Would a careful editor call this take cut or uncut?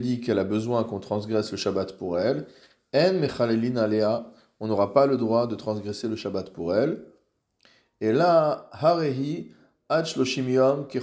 uncut